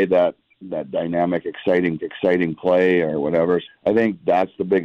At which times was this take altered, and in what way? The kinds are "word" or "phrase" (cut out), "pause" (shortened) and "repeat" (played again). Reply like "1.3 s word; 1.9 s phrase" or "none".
2.0 s repeat; 3.7 s word